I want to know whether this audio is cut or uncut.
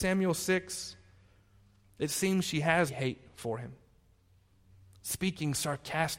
cut